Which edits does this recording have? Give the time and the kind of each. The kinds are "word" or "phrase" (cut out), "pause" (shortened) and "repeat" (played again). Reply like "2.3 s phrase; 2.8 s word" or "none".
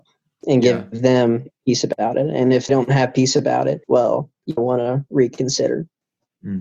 2.7 s word; 3.8 s pause; 4.6 s word